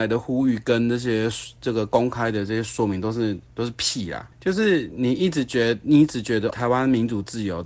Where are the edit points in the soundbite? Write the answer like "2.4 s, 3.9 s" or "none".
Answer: 3.5 s, 4.3 s, 6.5 s